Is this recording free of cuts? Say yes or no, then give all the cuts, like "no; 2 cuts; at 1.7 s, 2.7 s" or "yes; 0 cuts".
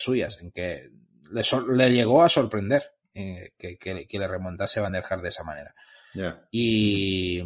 yes; 0 cuts